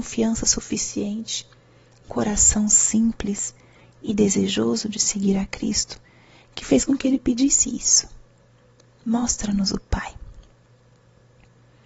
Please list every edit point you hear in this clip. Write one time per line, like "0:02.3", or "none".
0:02.1